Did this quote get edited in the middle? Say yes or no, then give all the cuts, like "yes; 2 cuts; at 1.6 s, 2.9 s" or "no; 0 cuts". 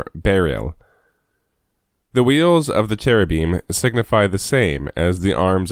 no; 0 cuts